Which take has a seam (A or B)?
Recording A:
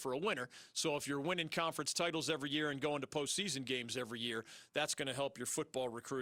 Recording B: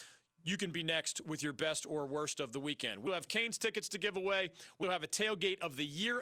B